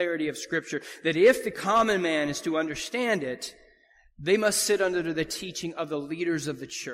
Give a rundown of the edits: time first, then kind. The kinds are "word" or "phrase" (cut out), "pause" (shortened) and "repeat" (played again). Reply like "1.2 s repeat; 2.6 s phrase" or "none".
none